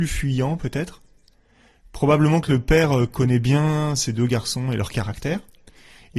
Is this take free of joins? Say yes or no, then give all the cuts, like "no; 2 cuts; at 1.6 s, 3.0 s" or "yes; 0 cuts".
yes; 0 cuts